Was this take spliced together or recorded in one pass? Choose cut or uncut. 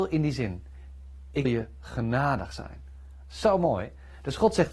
cut